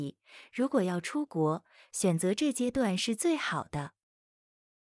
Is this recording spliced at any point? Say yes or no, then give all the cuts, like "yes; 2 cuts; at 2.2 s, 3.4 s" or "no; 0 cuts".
no; 0 cuts